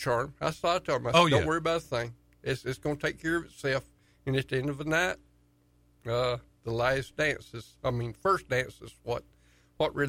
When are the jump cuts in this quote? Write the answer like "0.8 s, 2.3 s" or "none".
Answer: none